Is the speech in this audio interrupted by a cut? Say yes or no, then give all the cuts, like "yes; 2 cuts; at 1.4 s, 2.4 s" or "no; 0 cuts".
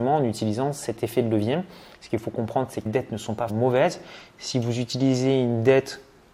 yes; 2 cuts; at 2.9 s, 3.5 s